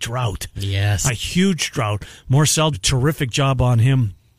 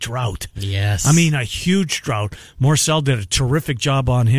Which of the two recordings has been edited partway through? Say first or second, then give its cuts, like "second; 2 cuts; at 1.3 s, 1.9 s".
first; 2 cuts; at 1.1 s, 2.7 s